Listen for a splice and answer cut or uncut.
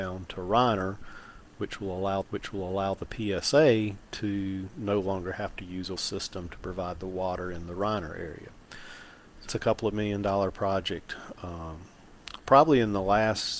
cut